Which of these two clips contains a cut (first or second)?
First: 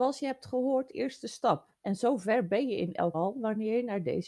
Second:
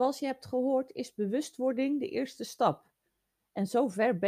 first